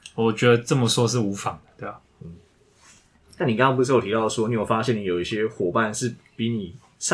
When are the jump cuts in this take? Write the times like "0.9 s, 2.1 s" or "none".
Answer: none